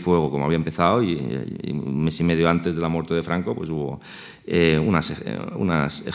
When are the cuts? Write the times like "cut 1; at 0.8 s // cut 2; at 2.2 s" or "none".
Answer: none